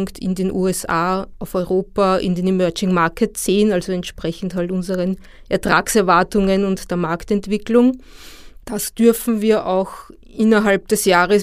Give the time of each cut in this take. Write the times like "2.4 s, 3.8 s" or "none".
none